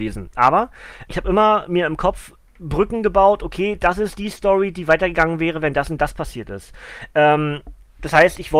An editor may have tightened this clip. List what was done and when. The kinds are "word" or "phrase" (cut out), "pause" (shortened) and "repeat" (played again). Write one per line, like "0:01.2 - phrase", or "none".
0:01.1 - word